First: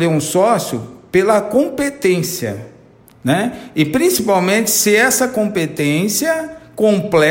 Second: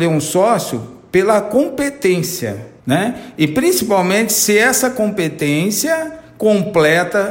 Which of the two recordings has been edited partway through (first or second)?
second